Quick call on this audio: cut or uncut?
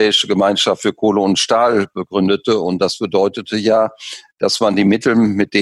uncut